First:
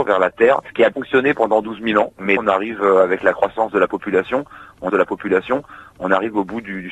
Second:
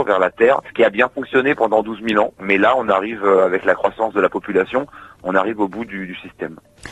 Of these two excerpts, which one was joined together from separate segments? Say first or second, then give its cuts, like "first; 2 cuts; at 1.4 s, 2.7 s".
first; 3 cuts; at 0.9 s, 2.4 s, 4.9 s